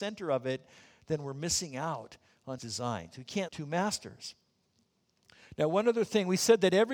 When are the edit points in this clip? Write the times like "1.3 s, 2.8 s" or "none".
2.6 s, 3.5 s